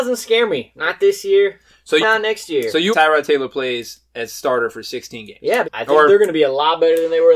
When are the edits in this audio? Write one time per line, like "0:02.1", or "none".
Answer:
0:02.0
0:02.9
0:05.6